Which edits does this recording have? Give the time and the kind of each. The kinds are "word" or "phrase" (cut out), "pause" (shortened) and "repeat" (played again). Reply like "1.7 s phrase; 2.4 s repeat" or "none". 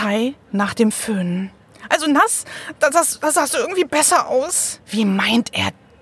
4.8 s pause